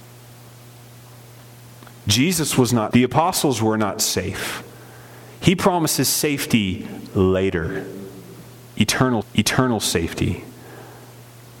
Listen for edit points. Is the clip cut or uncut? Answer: cut